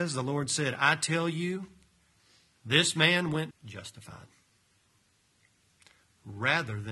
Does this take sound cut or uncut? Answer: cut